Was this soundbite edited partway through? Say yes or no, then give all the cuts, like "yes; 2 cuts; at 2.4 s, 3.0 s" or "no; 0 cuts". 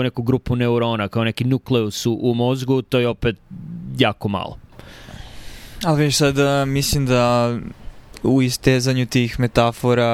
no; 0 cuts